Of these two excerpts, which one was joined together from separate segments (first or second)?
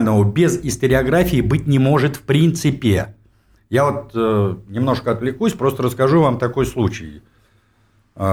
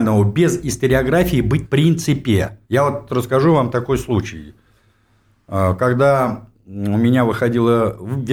second